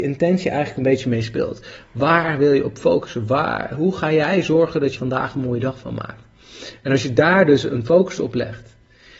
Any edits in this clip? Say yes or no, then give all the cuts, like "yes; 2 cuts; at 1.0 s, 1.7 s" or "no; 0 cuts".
yes; 1 cut; at 5.0 s